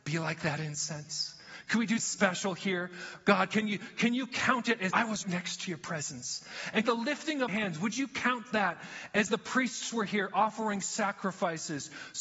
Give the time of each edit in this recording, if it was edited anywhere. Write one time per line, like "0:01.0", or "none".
0:02.0
0:04.9
0:05.2
0:06.8
0:07.5
0:09.3